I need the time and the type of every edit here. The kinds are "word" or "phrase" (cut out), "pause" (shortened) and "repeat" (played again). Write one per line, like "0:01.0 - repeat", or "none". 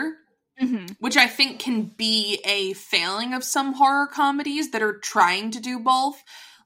none